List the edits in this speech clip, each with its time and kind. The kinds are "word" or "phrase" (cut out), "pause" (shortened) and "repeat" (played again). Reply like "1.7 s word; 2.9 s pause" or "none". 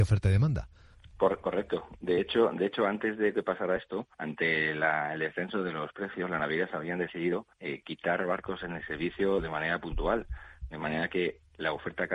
0.9 s pause; 4.1 s pause; 7.5 s pause